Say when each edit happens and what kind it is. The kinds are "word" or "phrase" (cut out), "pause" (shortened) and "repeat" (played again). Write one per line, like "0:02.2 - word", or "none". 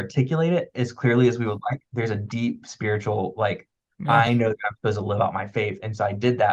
none